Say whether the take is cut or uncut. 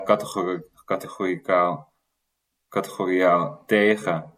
uncut